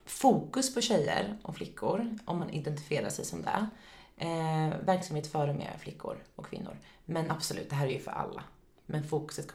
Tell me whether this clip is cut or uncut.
uncut